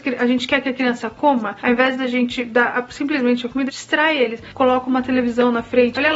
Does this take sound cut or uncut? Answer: cut